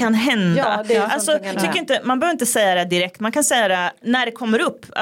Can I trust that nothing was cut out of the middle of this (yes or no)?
no